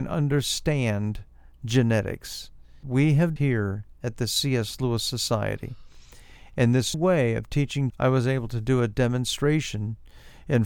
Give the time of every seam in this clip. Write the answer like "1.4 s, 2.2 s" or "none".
2.8 s, 3.4 s, 6.9 s, 7.9 s